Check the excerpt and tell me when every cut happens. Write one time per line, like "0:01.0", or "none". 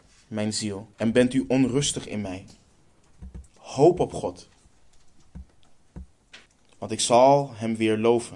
0:00.9
0:03.5
0:06.5